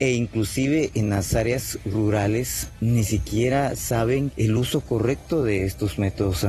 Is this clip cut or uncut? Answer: uncut